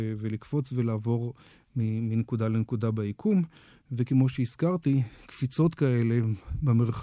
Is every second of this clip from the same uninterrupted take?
yes; 0 cuts

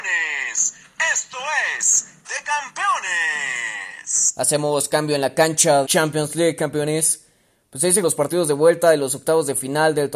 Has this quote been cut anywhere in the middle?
yes; 3 cuts; at 2.2 s, 5.8 s, 8.0 s

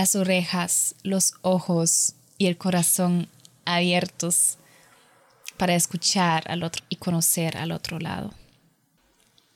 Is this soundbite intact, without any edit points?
no; 1 cut; at 6.8 s

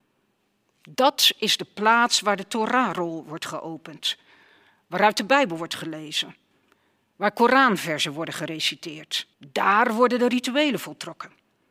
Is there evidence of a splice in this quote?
yes; 1 cut; at 9.3 s

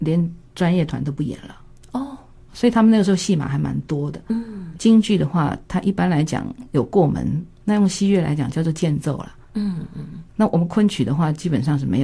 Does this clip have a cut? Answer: yes; 3 cuts; at 2.5 s, 7.6 s, 10.3 s

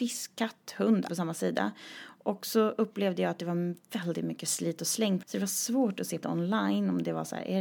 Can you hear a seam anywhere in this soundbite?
yes; 3 cuts; at 1.1 s, 5.2 s, 6.2 s

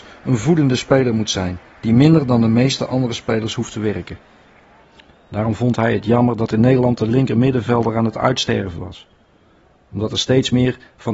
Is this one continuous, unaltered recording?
no; 2 cuts; at 1.7 s, 4.8 s

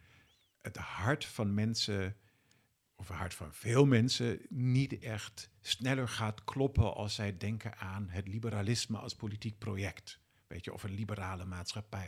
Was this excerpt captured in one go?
yes; 0 cuts

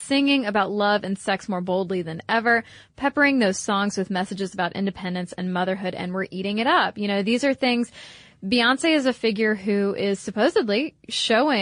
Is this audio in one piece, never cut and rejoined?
yes; 0 cuts

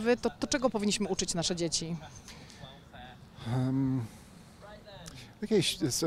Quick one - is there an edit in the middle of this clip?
no; 0 cuts

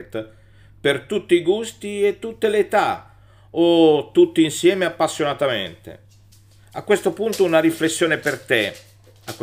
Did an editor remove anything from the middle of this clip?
no; 0 cuts

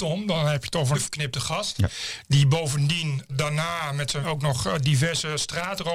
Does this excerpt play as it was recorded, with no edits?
no; 3 cuts; at 0.9 s, 3.3 s, 4.2 s

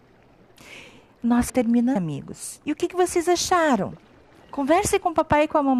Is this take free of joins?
no; 2 cuts; at 1.5 s, 2.0 s

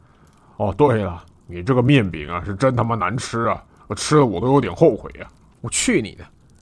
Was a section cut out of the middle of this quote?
no; 0 cuts

